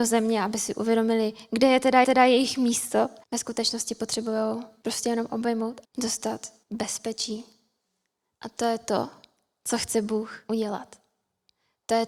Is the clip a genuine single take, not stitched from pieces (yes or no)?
no